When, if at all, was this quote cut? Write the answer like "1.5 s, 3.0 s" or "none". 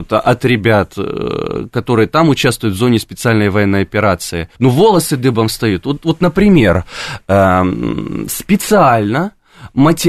4.5 s